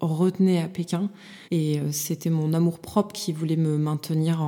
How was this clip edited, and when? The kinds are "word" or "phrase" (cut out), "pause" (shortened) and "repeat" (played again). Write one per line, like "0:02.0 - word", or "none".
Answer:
0:01.4 - pause